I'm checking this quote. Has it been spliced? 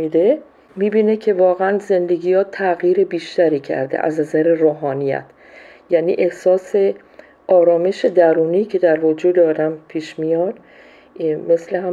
no; 0 cuts

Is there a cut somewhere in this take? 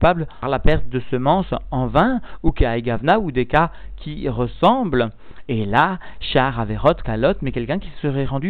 no; 0 cuts

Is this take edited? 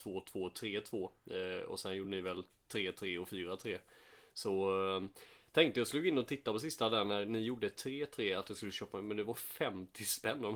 no; 0 cuts

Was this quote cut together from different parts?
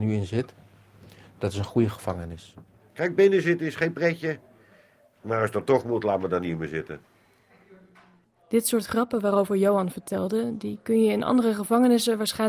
no; 0 cuts

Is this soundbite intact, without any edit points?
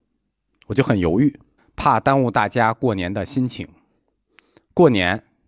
no; 1 cut; at 1.6 s

